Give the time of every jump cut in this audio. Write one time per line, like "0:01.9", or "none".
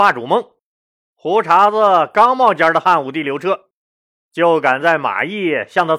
none